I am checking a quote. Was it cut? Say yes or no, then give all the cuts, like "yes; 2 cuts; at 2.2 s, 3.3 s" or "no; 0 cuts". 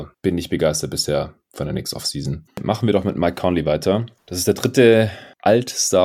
no; 0 cuts